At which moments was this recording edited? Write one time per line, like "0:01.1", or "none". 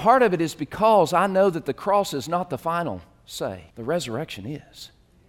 0:03.7

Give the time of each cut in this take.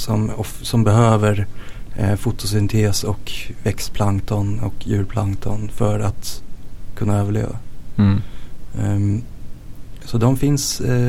none

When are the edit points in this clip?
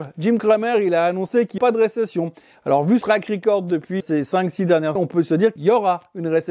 0:01.6
0:03.0
0:04.0
0:05.0
0:05.6

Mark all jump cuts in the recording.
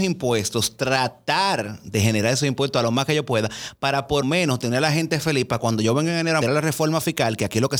0:04.2
0:06.4

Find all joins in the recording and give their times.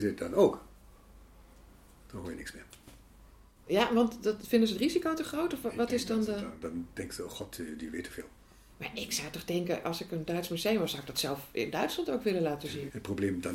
none

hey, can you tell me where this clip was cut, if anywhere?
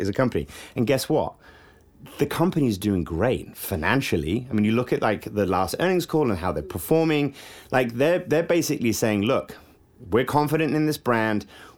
none

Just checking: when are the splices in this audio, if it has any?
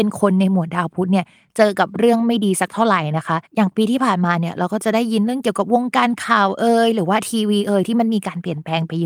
none

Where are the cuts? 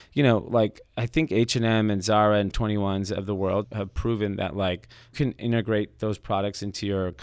0:02.5
0:03.6
0:05.1

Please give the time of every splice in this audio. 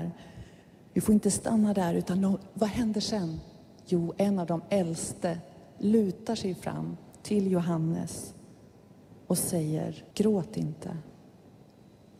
0:10.1

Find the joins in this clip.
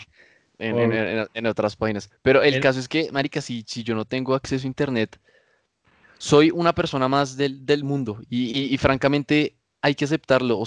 none

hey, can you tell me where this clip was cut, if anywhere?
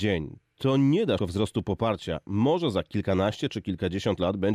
0:01.2

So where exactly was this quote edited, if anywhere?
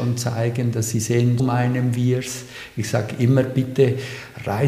0:01.4

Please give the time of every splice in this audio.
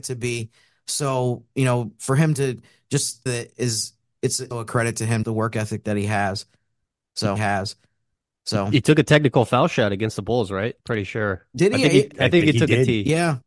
0:03.3
0:04.5
0:05.2
0:07.4
0:10.8

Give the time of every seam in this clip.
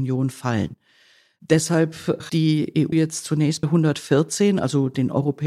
0:02.3
0:02.9
0:03.6

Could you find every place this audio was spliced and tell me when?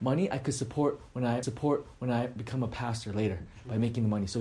0:01.4

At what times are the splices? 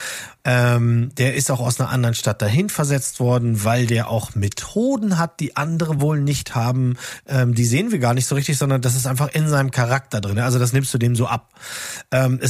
none

